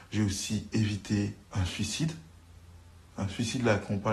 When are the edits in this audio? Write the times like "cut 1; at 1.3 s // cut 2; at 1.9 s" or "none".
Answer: cut 1; at 1.4 s

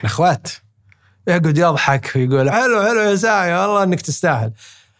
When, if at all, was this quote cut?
cut 1; at 2.5 s

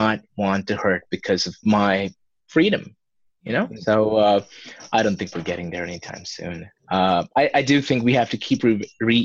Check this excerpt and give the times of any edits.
none

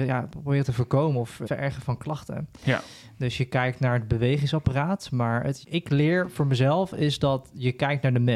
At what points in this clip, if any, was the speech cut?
cut 1; at 1.5 s // cut 2; at 5.6 s

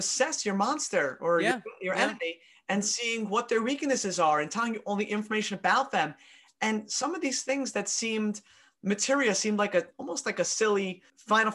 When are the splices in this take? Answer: none

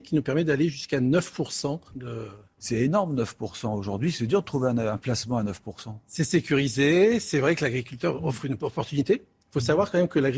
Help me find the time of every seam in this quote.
cut 1; at 1.9 s

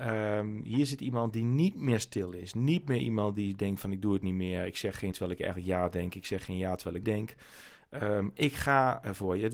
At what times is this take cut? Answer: cut 1; at 5.1 s // cut 2; at 7.0 s

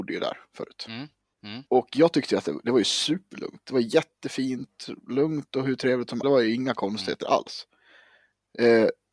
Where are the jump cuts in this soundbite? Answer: cut 1; at 1.7 s // cut 2; at 6.2 s

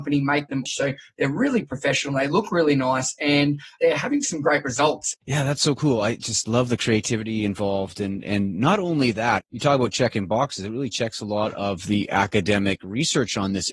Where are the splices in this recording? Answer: cut 1; at 5.2 s

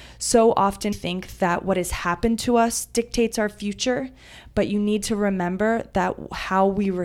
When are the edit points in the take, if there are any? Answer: cut 1; at 0.9 s

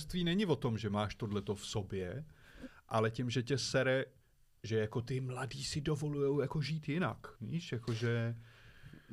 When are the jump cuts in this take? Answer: cut 1; at 7.4 s

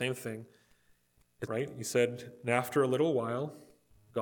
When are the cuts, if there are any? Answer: cut 1; at 1.5 s

